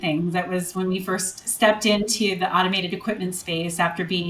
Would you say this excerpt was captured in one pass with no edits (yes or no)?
yes